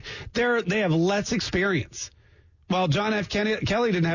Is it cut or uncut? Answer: uncut